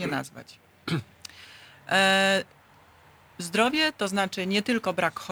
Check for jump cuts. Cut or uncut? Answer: uncut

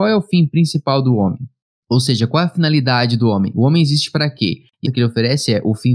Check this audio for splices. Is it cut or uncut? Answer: cut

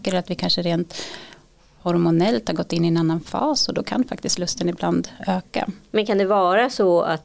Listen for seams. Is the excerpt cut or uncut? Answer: uncut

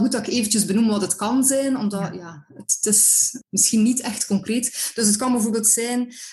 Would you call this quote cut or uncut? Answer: uncut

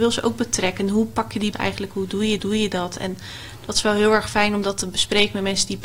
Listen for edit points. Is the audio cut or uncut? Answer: cut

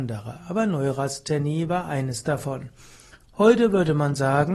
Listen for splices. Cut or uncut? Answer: uncut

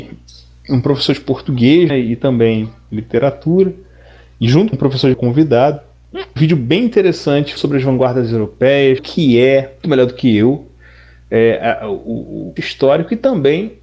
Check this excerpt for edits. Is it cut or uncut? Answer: cut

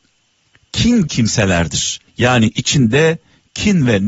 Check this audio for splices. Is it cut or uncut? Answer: cut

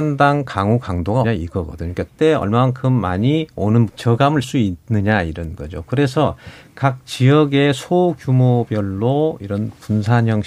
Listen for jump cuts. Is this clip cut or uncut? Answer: cut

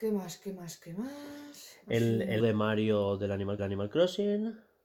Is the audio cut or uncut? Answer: cut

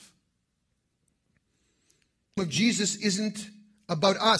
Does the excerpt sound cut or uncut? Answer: cut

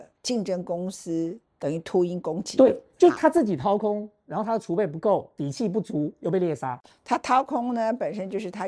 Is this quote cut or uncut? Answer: cut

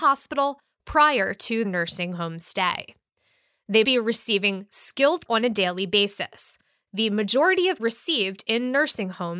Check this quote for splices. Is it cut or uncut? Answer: cut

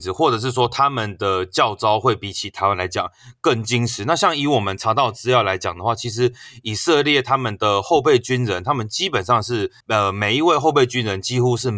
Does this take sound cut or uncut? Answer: cut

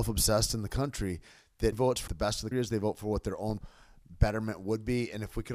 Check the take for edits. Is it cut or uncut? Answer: cut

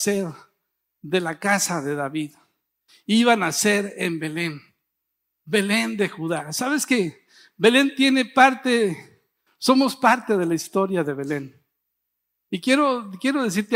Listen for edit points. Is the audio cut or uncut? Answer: uncut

